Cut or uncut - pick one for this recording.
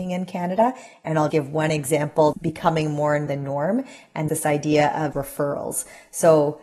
cut